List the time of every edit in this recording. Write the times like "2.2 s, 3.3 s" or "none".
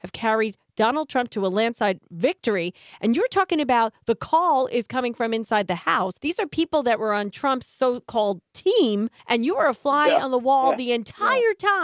6.2 s, 9.2 s